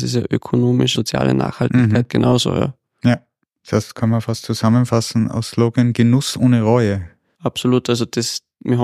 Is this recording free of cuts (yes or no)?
no